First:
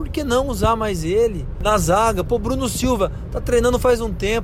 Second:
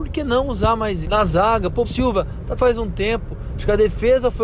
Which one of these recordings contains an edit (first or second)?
second